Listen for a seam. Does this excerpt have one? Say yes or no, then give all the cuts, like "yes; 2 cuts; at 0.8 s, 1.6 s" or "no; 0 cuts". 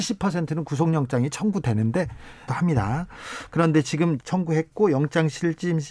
yes; 2 cuts; at 2.5 s, 4.2 s